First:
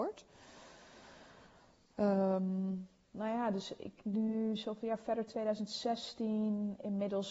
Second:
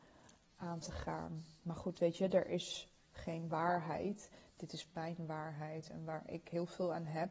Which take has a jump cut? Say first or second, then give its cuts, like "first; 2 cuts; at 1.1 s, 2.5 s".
second; 1 cut; at 1.6 s